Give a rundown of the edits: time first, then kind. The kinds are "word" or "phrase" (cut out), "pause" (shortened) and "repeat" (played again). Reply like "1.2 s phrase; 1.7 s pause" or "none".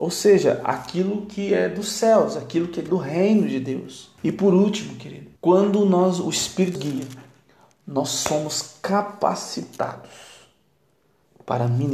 2.9 s phrase; 4.2 s pause; 5.4 s pause; 6.8 s word